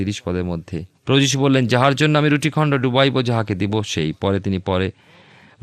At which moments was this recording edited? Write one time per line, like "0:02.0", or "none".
0:01.0